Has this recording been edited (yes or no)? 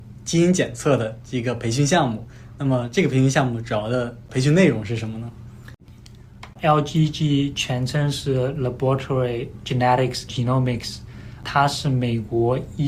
yes